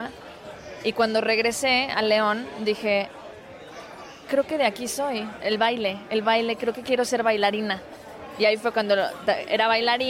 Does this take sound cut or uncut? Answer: uncut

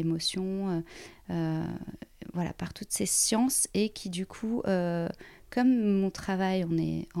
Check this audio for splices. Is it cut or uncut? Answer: uncut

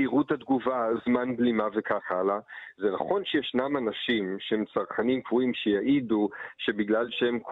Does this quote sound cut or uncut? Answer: uncut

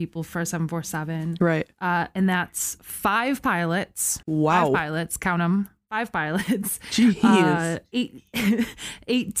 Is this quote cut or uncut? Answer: cut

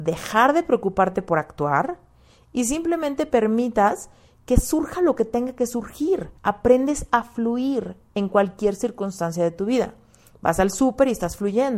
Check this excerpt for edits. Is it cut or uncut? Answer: cut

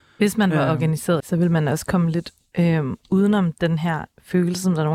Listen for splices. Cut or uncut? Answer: cut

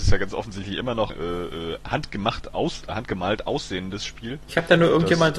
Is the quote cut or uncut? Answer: cut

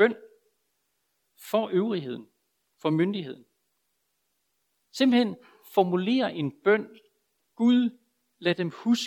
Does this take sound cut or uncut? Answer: uncut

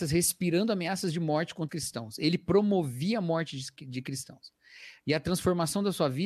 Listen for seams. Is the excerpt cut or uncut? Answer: cut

